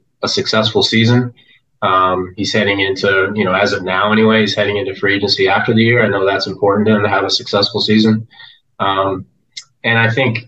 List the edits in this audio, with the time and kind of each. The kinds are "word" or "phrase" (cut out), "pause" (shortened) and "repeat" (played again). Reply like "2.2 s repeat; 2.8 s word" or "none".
none